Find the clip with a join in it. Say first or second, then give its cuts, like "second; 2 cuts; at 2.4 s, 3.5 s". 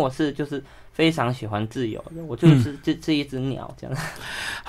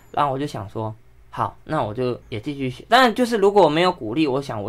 second; 1 cut; at 2.2 s